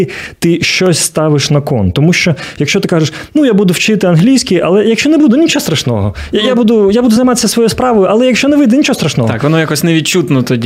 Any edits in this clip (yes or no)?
no